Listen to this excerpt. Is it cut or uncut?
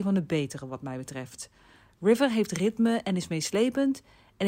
uncut